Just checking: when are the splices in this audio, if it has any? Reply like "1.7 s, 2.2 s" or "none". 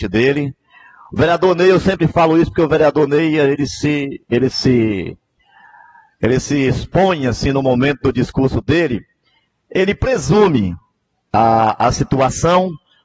none